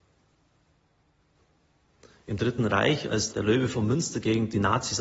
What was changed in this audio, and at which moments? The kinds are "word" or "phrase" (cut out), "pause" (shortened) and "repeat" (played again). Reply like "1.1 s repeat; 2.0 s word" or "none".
3.3 s word